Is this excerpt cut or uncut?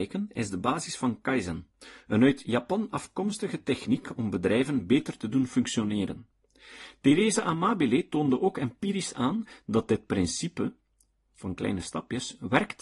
uncut